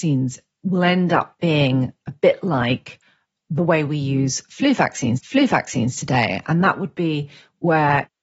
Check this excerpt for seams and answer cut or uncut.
cut